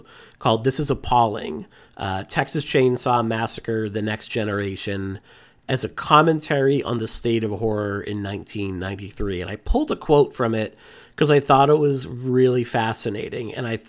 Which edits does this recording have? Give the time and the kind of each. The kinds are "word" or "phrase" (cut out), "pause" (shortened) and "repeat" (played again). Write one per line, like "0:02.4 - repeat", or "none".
none